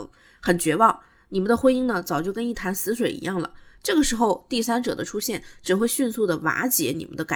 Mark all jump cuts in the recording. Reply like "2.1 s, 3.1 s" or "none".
none

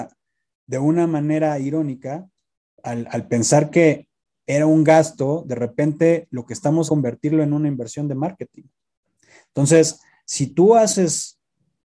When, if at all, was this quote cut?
6.9 s

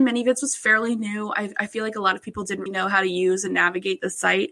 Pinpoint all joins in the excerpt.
2.7 s

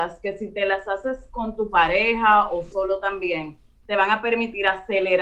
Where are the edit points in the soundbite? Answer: 2.7 s

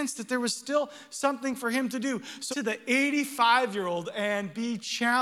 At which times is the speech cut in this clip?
2.5 s

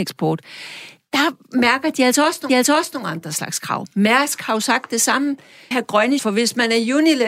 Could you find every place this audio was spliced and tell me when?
2.5 s, 5.7 s, 6.2 s

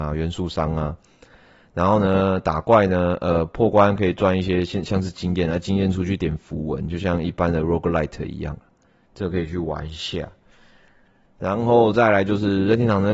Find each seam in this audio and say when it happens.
none

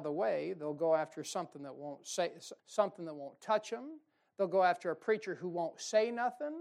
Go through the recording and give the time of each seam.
2.6 s

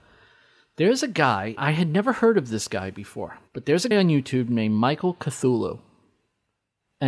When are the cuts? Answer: 1.6 s, 3.5 s, 3.9 s

